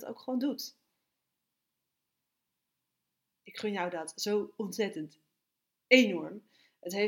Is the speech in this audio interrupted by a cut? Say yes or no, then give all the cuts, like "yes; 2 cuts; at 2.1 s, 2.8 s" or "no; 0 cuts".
no; 0 cuts